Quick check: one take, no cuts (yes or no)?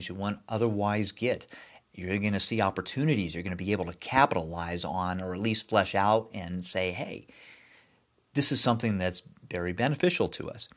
yes